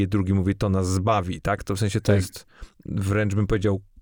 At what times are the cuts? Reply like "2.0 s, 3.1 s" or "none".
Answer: none